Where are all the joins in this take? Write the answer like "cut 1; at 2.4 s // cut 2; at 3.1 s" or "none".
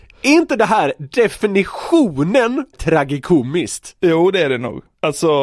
cut 1; at 2.7 s